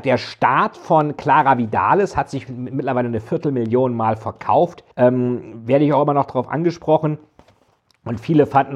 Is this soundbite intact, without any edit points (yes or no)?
no